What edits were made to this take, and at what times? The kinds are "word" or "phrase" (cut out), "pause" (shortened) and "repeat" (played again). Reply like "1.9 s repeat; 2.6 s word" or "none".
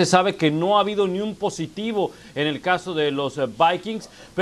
none